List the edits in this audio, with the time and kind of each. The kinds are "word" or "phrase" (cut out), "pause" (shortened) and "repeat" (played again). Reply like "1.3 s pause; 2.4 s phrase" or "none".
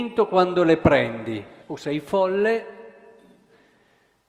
1.6 s pause